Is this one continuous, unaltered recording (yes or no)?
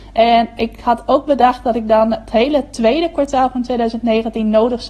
yes